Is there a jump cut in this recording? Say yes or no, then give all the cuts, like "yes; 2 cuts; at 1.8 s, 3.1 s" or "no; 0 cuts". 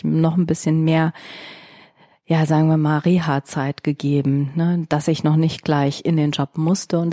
no; 0 cuts